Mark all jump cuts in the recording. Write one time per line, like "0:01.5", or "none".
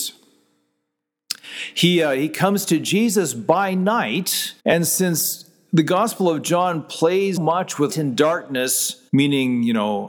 0:04.6
0:07.4
0:07.9
0:09.1